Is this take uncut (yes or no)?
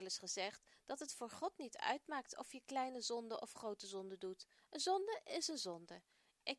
yes